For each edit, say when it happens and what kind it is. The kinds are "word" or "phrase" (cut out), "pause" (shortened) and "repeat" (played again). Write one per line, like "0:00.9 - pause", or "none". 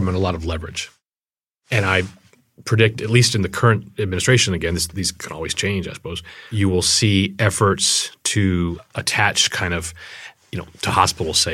none